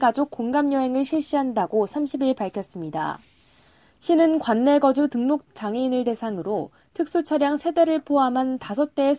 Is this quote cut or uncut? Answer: uncut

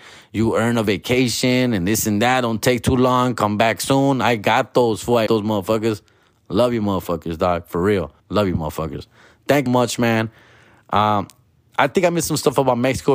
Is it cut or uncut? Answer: cut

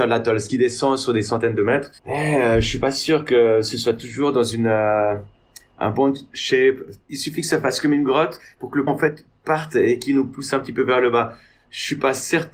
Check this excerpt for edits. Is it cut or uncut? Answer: cut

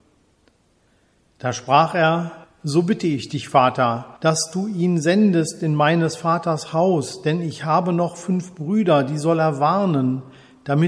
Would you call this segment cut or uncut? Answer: cut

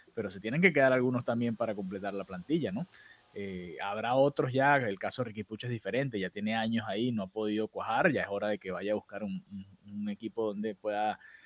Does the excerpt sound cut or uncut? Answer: uncut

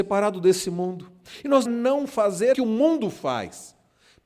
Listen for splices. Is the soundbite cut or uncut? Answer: cut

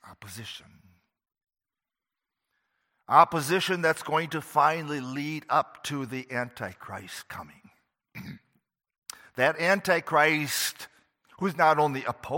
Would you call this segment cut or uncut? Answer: uncut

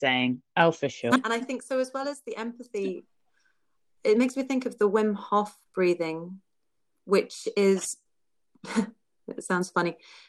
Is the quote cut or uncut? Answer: uncut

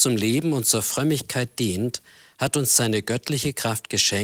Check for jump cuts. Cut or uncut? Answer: uncut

